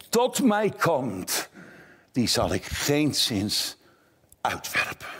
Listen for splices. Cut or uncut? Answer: uncut